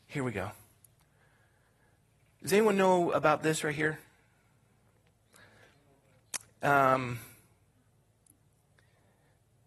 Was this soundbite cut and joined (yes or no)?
yes